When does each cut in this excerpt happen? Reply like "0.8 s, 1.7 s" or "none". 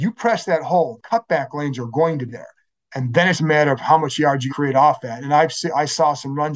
1.0 s, 2.3 s, 3.3 s, 4.5 s

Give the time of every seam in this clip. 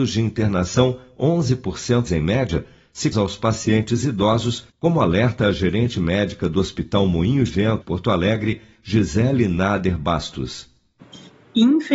2.1 s, 3.1 s, 4.7 s, 7.5 s, 7.8 s

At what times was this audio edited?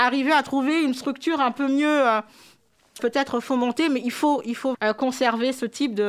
3.0 s, 4.7 s

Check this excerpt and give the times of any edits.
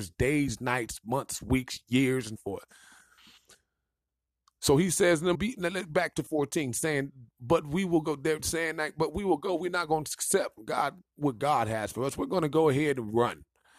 2.4 s, 5.3 s, 7.3 s

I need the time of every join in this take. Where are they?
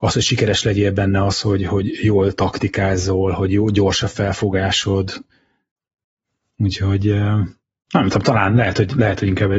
none

